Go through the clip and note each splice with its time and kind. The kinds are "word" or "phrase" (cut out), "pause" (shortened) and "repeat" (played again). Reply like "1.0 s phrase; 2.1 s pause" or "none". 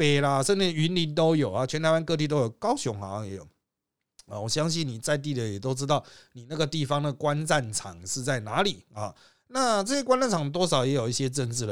none